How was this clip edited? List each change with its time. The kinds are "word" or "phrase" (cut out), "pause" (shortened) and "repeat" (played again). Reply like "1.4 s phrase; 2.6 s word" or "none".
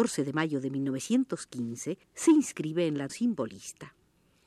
2.0 s pause; 3.1 s word